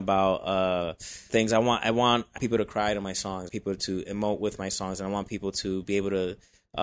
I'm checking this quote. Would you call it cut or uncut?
cut